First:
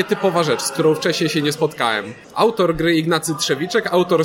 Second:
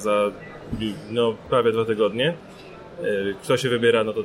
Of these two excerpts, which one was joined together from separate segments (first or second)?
first